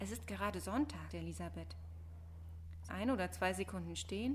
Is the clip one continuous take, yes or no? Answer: no